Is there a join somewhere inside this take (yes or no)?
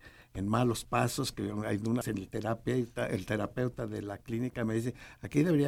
yes